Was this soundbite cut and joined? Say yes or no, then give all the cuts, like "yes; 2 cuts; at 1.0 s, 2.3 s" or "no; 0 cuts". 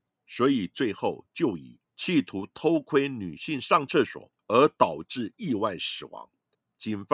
yes; 1 cut; at 4.4 s